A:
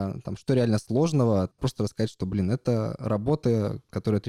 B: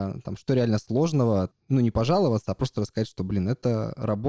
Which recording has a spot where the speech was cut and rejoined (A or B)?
A